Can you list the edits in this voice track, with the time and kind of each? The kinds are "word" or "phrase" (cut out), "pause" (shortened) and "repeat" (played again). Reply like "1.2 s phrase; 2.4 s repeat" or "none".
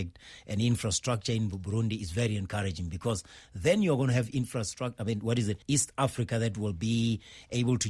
5.6 s pause